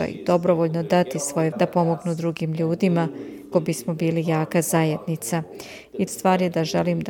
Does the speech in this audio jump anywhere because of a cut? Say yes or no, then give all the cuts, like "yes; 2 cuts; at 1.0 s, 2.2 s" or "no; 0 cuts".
yes; 3 cuts; at 1.5 s, 3.5 s, 6.1 s